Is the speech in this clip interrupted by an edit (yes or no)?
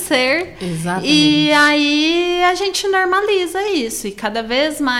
no